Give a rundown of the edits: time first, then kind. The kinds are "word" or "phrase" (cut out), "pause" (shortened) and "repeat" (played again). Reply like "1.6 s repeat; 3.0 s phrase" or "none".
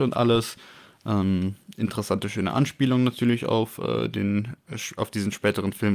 none

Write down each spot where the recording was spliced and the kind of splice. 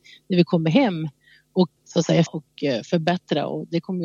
1.8 s word; 2.3 s word

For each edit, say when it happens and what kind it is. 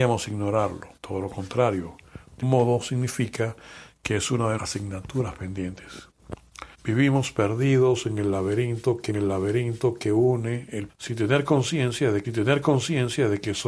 1.0 s pause; 2.4 s word; 4.6 s word; 6.7 s pause; 9.1 s repeat; 10.9 s phrase; 12.2 s repeat

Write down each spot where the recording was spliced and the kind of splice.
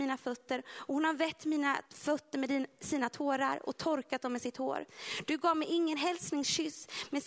1.9 s pause

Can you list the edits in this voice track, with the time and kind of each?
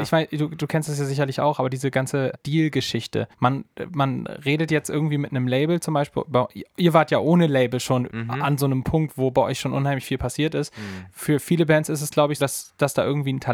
2.3 s word; 3.3 s pause; 8.1 s word; 12.4 s word

